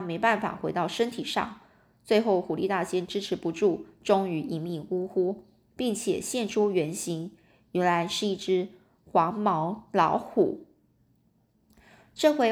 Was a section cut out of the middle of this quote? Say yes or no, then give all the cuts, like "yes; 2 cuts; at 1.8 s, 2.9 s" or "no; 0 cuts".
no; 0 cuts